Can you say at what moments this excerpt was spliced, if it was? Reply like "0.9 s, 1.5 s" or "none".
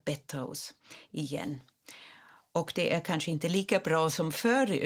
none